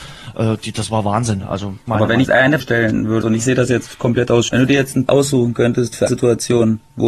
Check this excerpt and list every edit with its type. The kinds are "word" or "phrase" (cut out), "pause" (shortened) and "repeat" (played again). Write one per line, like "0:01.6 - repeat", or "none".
0:01.9 - word
0:02.2 - word
0:02.6 - word
0:03.2 - word
0:04.5 - word
0:05.1 - word
0:06.1 - word